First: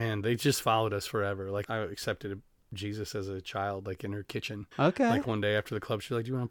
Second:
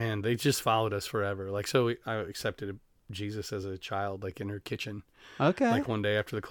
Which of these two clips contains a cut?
first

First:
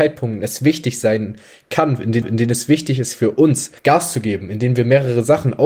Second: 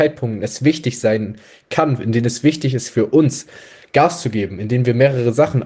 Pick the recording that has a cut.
first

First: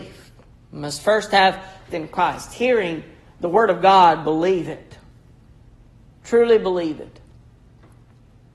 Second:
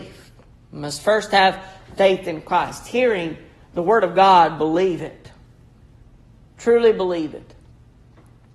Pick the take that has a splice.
first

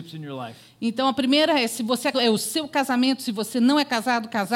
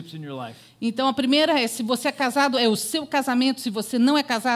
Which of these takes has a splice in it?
first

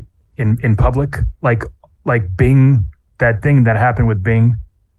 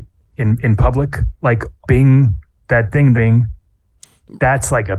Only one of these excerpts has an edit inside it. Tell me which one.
second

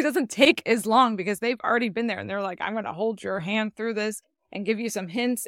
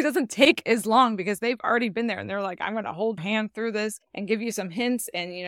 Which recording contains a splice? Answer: second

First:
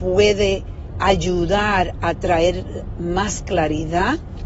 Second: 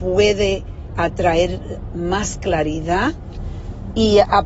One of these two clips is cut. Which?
second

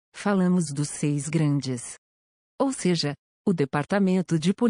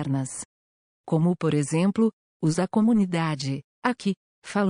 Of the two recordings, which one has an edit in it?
second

